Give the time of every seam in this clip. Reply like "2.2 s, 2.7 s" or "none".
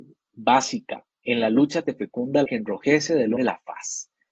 1.8 s, 2.5 s, 3.4 s